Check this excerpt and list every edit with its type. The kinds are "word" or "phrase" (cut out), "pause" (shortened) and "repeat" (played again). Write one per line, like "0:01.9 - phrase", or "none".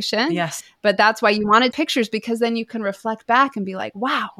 0:01.7 - phrase